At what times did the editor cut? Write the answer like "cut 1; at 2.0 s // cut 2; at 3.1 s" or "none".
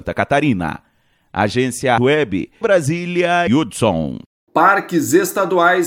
cut 1; at 2.0 s // cut 2; at 2.6 s // cut 3; at 3.5 s